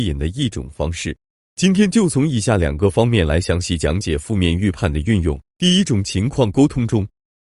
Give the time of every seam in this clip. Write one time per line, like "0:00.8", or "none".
0:05.5